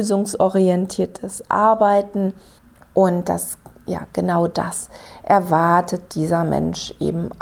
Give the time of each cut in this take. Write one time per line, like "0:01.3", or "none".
0:02.6